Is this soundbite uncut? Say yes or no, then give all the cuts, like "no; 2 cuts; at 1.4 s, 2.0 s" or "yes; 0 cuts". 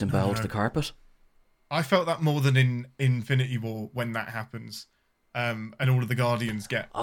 yes; 0 cuts